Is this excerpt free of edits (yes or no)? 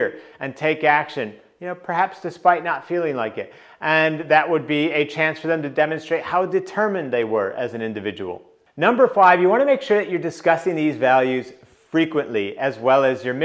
yes